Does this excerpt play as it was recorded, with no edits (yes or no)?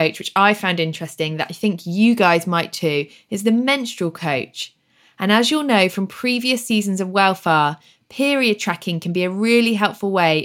yes